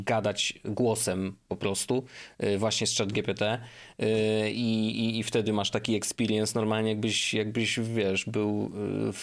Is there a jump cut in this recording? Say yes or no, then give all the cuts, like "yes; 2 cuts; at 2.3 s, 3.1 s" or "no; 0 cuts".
no; 0 cuts